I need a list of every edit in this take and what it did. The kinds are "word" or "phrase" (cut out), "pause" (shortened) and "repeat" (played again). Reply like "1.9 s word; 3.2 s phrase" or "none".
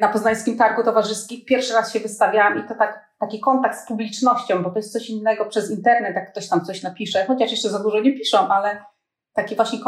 none